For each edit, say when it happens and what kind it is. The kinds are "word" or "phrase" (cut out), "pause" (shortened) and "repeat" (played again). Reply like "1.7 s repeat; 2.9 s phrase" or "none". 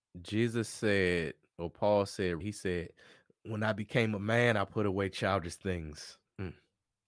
2.4 s word

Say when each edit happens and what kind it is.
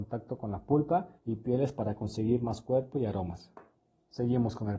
1.2 s pause; 3.7 s pause

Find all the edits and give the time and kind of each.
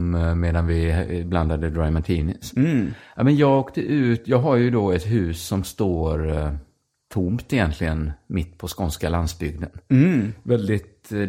none

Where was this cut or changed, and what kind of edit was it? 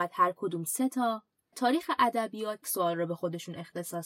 1.5 s word; 2.6 s word

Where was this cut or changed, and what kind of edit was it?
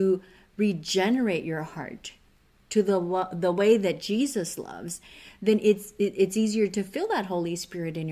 none

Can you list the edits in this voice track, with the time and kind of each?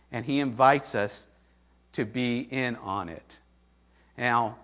none

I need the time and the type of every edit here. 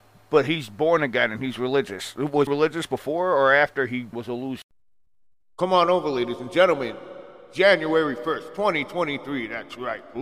2.5 s phrase; 4.1 s word; 5.1 s pause

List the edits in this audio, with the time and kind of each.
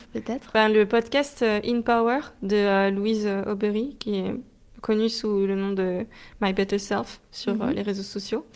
none

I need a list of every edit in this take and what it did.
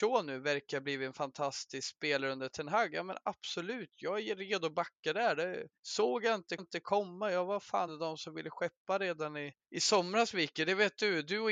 5.8 s pause; 6.6 s repeat; 7.9 s word; 9.6 s pause

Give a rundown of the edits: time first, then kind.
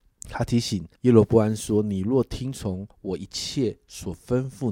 1.0 s pause; 2.9 s pause

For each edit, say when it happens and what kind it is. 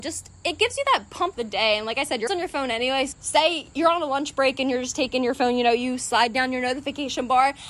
1.3 s word; 2.3 s word; 3.1 s word

